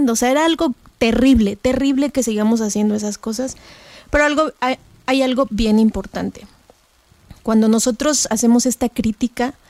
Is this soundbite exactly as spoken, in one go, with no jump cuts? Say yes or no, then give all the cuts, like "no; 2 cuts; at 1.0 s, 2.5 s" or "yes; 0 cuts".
yes; 0 cuts